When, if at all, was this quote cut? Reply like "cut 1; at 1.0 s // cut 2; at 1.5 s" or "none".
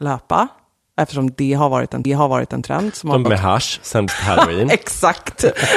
cut 1; at 2.0 s // cut 2; at 3.2 s // cut 3; at 4.1 s